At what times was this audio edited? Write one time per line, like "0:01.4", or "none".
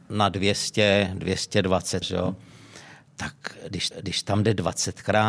0:02.0
0:03.9